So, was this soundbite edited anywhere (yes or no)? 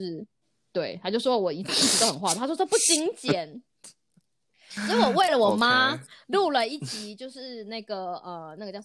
no